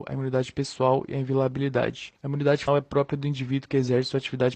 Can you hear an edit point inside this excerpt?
yes; 2 cuts; at 2.2 s, 2.7 s

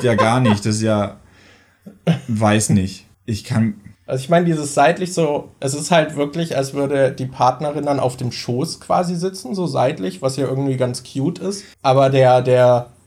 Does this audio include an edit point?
yes; 3 cuts; at 3.1 s, 3.9 s, 11.7 s

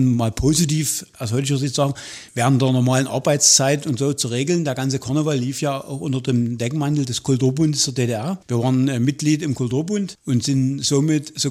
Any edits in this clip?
yes; 1 cut; at 2.3 s

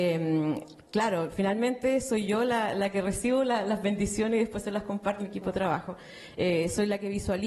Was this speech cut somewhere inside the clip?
yes; 1 cut; at 5.2 s

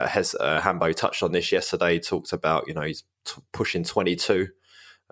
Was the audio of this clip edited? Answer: no; 0 cuts

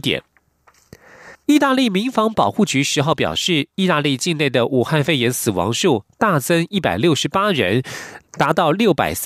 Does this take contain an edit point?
yes; 2 cuts; at 1.3 s, 8.3 s

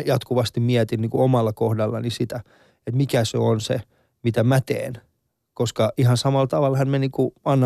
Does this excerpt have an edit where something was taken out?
no; 0 cuts

